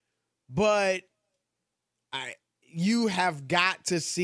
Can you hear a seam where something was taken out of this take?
no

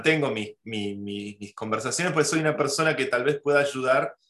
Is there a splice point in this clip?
no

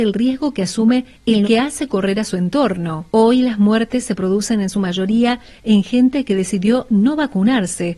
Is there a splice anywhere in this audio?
yes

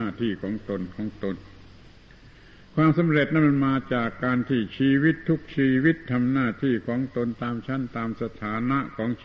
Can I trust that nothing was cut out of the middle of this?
yes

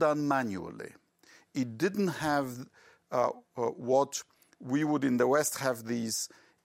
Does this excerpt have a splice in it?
no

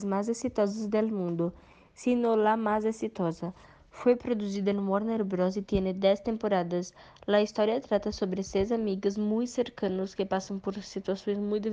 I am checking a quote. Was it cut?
no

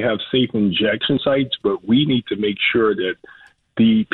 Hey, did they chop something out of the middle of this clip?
no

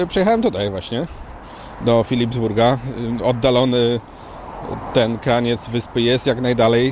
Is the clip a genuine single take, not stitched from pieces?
yes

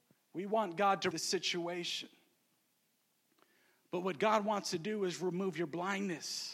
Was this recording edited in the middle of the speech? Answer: yes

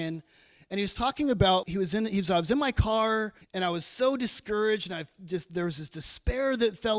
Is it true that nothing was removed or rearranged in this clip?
no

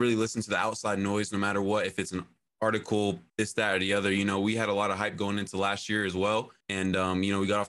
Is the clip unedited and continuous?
no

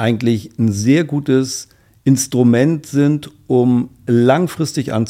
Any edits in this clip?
no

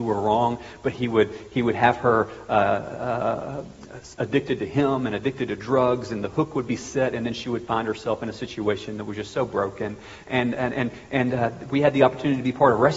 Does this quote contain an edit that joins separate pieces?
no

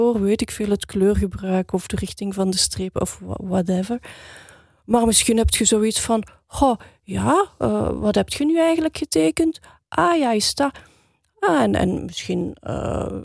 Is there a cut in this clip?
no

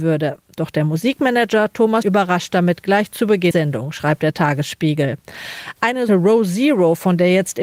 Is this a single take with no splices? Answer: no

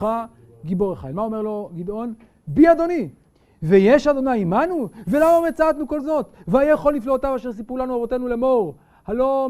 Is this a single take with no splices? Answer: yes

